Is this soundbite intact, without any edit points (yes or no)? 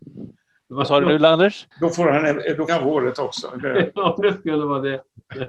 no